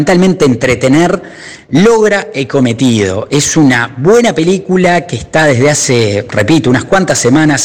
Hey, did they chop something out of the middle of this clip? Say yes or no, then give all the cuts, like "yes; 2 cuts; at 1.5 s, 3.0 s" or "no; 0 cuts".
no; 0 cuts